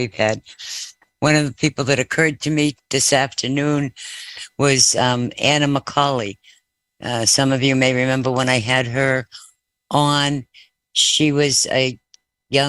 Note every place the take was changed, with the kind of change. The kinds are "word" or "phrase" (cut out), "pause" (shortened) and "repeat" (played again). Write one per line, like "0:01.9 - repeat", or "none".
none